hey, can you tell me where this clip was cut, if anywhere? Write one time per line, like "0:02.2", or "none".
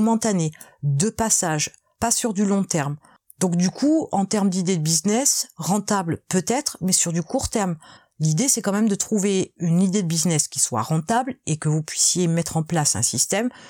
none